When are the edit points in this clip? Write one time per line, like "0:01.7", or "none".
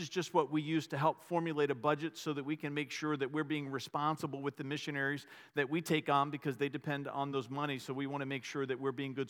none

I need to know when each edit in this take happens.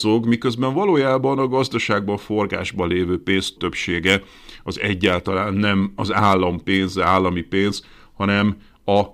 0:03.6

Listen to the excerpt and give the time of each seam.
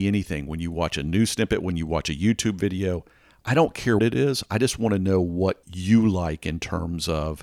0:04.0
0:05.6

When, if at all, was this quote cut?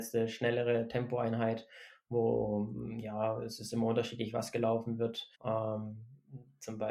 0:05.3

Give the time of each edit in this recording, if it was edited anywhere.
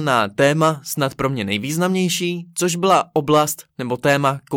none

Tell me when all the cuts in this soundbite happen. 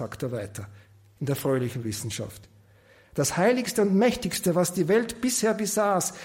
none

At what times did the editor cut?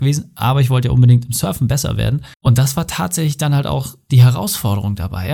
0:02.3

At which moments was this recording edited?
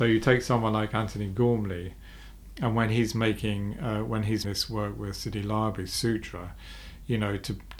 0:04.4

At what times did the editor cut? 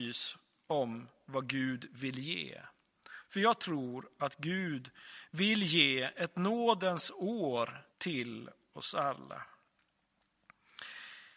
0:07.9

